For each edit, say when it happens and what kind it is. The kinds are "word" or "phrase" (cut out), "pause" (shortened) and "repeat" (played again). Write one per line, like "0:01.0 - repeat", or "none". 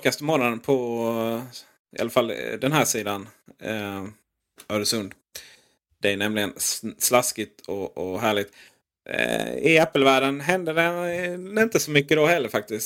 none